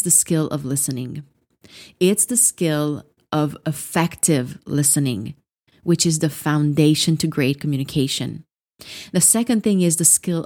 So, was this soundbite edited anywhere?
no; 0 cuts

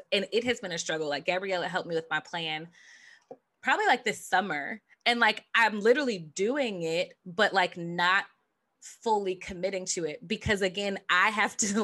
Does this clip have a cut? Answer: no; 0 cuts

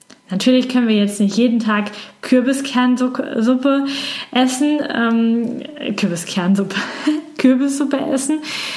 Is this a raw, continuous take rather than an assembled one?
yes; 0 cuts

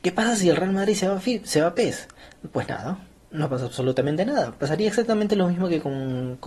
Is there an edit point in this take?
no; 0 cuts

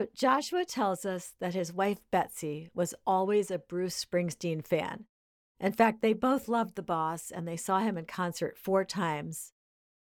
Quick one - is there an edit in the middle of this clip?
no; 0 cuts

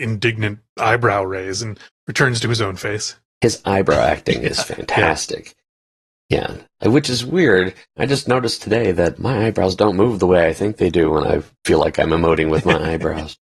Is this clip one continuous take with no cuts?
yes; 0 cuts

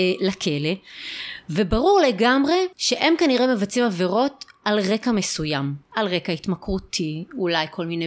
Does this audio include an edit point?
yes; 1 cut; at 2.7 s

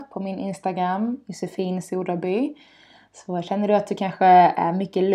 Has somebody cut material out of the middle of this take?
no; 0 cuts

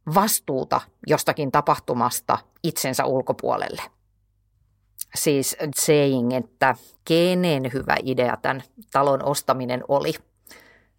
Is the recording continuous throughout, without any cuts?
no; 2 cuts; at 5.7 s, 7.0 s

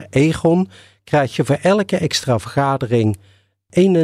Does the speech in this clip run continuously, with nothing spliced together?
yes; 0 cuts

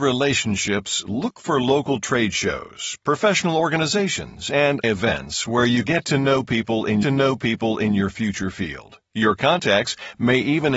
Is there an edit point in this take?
yes; 4 cuts; at 4.8 s, 5.8 s, 7.0 s, 9.0 s

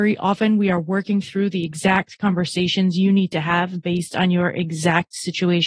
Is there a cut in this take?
no; 0 cuts

